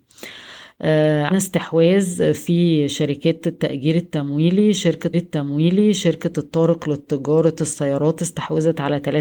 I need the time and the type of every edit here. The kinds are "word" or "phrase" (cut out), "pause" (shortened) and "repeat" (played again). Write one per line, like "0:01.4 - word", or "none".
0:01.3 - word
0:05.1 - repeat